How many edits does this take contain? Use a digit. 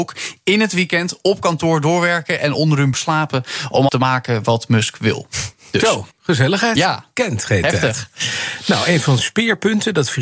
4